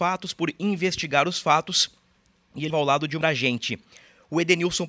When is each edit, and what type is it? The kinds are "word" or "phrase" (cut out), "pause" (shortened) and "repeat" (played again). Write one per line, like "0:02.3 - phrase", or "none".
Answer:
0:02.7 - word
0:03.2 - word